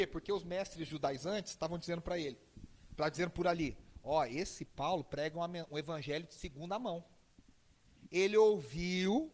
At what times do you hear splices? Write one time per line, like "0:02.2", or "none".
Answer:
none